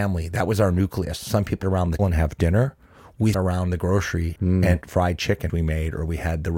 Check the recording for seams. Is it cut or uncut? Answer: cut